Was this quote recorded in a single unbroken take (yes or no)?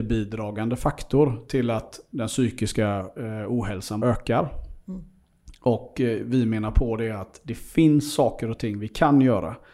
no